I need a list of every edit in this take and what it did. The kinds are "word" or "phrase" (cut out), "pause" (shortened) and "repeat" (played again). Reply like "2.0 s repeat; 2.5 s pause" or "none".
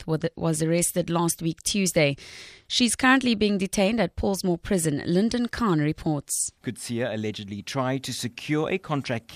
6.6 s pause